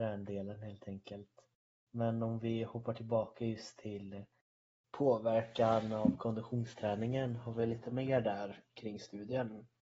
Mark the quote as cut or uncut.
cut